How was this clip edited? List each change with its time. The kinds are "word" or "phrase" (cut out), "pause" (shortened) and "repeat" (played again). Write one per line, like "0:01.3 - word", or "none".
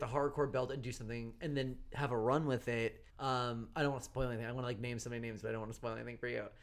0:03.1 - pause